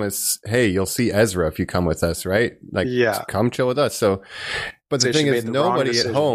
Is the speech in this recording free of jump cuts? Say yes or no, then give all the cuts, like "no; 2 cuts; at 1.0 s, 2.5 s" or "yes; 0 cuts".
yes; 0 cuts